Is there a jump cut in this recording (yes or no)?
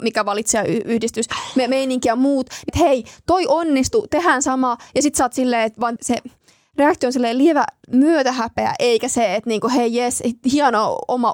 yes